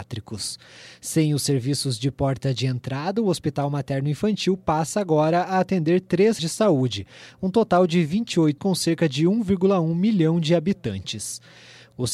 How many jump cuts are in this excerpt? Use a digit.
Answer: 2